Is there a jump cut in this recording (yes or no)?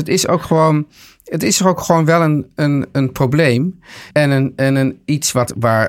yes